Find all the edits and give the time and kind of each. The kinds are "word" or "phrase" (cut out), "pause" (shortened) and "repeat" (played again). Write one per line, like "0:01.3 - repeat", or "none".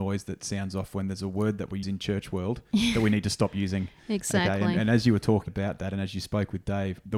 0:01.8 - word
0:05.5 - word